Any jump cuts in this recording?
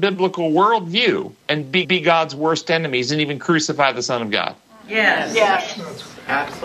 yes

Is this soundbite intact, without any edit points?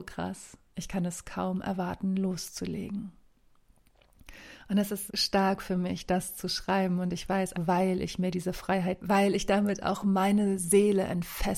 no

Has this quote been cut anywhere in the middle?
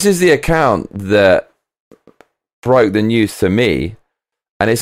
no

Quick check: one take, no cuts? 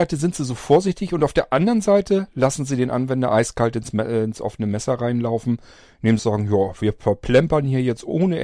no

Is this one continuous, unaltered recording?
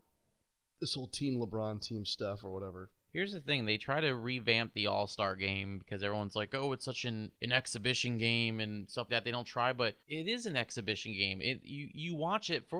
no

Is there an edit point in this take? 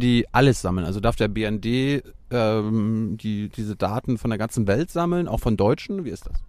no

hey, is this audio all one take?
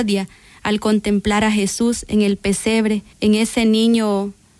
no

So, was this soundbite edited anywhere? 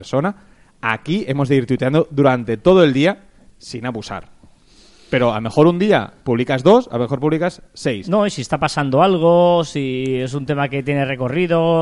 no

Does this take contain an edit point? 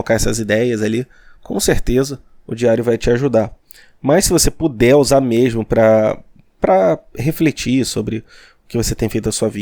no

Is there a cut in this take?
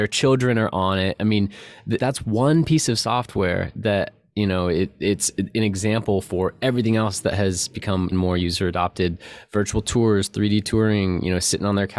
yes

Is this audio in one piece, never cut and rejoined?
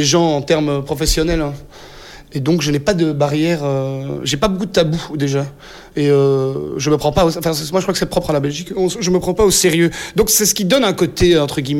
yes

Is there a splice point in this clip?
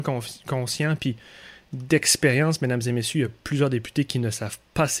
no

